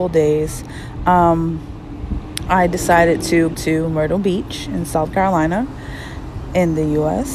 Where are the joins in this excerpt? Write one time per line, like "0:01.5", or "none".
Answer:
0:03.5

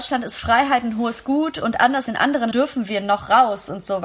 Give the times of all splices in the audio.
0:02.1
0:02.5

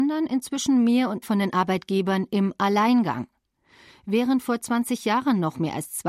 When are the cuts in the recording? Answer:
0:01.2

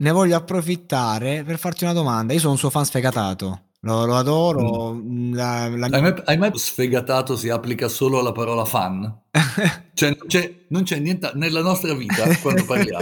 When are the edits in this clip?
0:06.5

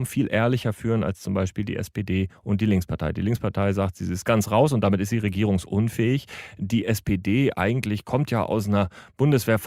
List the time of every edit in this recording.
none

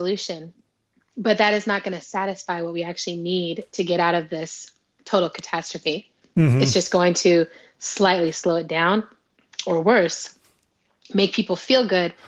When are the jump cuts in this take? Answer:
none

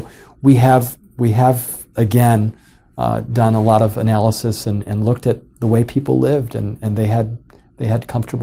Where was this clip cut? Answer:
none

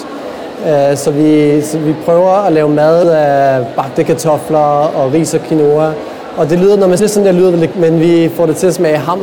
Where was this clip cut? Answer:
0:03.0
0:07.0
0:07.7

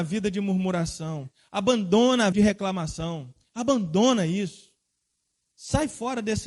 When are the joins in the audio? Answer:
0:02.3

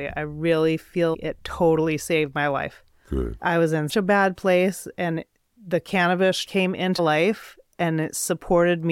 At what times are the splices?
0:01.1
0:03.0
0:03.4
0:03.9
0:06.5
0:07.0

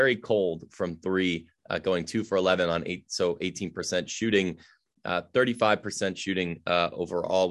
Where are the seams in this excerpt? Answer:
none

